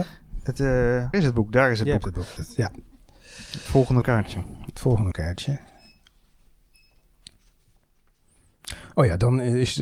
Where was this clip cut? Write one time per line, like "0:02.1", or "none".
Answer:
0:01.1
0:02.4
0:04.0
0:05.1